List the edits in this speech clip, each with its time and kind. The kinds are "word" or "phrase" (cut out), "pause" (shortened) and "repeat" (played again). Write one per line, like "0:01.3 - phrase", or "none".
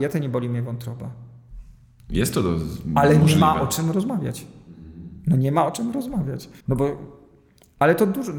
0:06.6 - pause